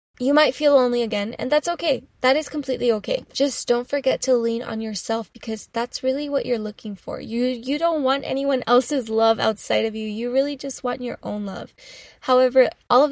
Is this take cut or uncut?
uncut